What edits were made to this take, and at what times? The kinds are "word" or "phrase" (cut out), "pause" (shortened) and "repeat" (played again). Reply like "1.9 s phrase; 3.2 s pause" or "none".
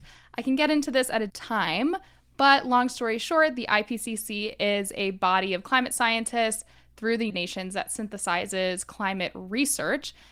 1.3 s word; 7.3 s word